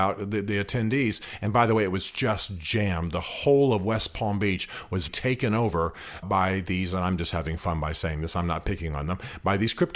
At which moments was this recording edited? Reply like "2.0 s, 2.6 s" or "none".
5.1 s, 6.2 s

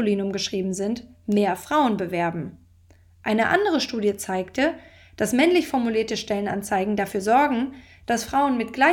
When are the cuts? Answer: none

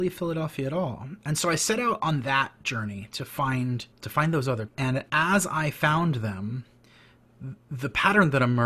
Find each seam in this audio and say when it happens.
3.9 s, 4.7 s

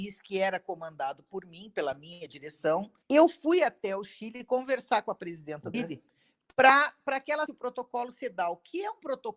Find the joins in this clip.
3.0 s, 5.7 s, 7.5 s

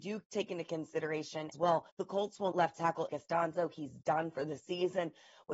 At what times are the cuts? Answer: 1.5 s, 1.9 s, 2.5 s, 3.1 s

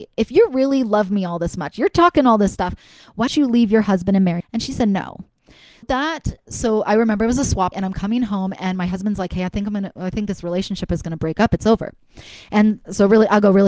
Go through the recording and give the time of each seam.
3.3 s, 4.4 s, 5.8 s, 6.5 s, 7.7 s

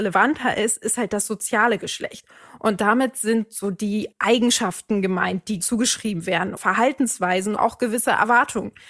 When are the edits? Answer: 4.1 s, 5.6 s, 6.6 s, 7.6 s

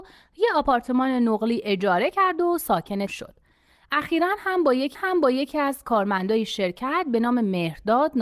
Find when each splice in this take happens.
3.1 s, 4.9 s

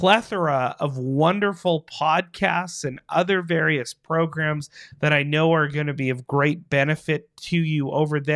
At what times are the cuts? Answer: none

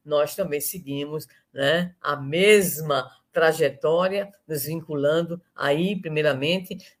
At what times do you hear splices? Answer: none

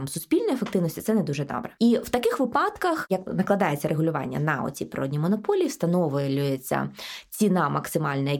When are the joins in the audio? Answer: 3.3 s

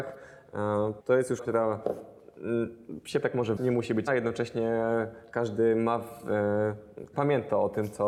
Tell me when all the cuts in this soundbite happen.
1.0 s, 1.4 s, 3.2 s, 3.6 s, 4.1 s, 7.1 s

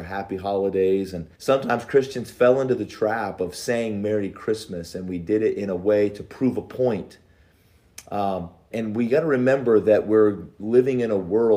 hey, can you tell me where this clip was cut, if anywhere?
1.3 s, 8.7 s

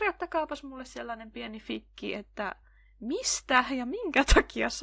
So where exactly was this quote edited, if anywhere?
none

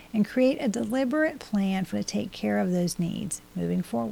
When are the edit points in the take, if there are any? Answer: 1.9 s

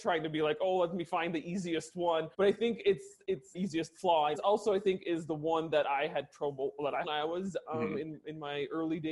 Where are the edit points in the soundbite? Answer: 2.3 s, 3.5 s, 4.3 s, 7.0 s

